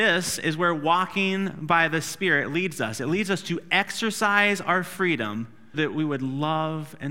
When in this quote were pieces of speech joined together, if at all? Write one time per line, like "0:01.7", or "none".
0:05.7